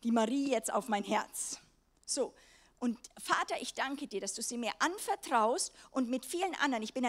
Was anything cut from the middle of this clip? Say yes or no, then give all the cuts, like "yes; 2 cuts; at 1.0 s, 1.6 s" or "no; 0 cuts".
no; 0 cuts